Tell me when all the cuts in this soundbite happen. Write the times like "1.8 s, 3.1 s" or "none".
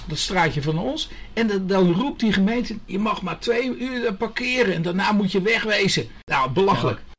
6.2 s